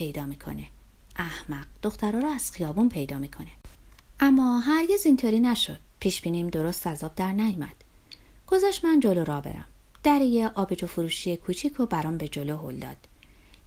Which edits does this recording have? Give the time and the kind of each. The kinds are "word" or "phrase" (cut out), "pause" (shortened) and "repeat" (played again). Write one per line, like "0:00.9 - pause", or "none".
none